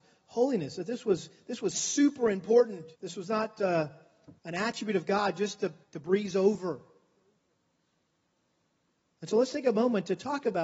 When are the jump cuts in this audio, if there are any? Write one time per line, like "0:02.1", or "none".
0:02.9
0:04.4
0:05.8